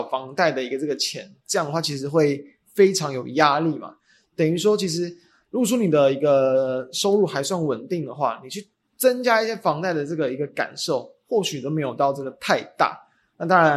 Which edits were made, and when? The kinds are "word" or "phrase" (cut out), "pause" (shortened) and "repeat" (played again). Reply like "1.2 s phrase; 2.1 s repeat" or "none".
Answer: none